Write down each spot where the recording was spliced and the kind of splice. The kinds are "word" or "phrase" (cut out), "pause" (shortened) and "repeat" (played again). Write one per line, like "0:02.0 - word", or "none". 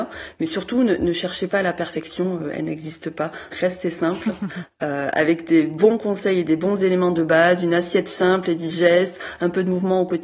0:03.5 - word